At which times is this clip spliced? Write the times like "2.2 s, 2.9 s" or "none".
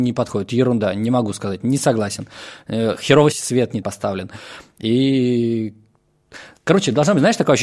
3.3 s, 3.8 s